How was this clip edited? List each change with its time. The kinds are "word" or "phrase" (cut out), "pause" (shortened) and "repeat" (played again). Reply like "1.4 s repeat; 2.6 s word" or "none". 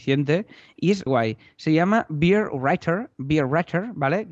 1.1 s word